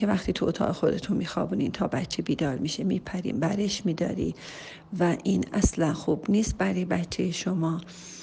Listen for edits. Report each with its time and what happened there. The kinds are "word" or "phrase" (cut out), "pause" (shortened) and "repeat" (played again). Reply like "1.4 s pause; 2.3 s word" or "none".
none